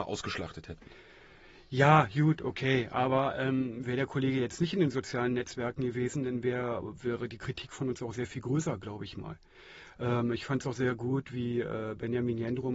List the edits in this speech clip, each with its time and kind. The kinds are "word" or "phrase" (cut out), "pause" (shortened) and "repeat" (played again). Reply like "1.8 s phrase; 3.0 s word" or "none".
none